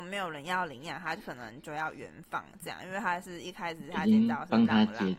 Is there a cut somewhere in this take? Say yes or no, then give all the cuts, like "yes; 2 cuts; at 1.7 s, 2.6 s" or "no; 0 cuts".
no; 0 cuts